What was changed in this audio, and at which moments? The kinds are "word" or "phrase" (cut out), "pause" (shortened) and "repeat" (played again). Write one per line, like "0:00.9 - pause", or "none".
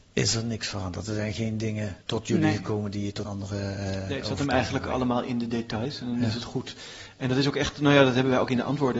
0:02.0 - pause
0:03.2 - word